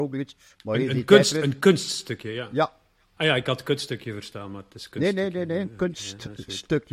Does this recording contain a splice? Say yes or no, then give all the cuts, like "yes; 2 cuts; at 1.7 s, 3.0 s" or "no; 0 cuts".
no; 0 cuts